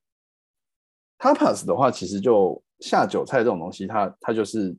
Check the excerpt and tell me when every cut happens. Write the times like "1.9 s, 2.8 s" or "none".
2.7 s

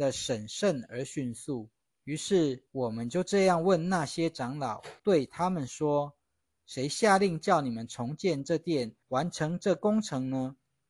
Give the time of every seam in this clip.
1.8 s, 2.7 s, 5.0 s, 9.0 s

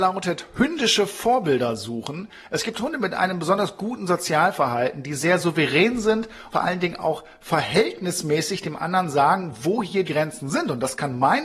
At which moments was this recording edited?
6.5 s, 10.0 s

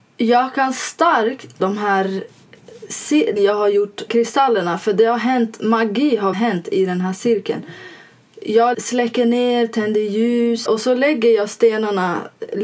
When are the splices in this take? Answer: 1.6 s, 3.4 s, 4.1 s, 6.3 s, 8.7 s, 10.7 s

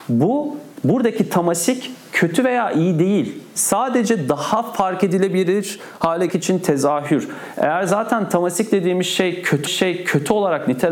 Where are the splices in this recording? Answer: 6.3 s, 9.7 s

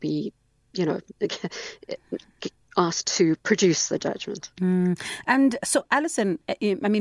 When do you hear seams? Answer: none

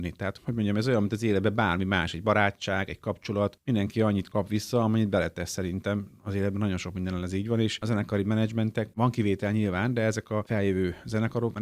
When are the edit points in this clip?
none

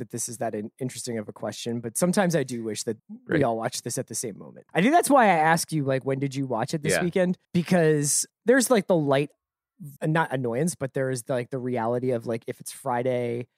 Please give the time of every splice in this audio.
3.0 s, 4.7 s, 7.4 s, 10.0 s

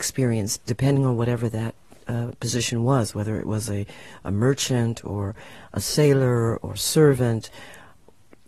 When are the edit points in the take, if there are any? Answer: none

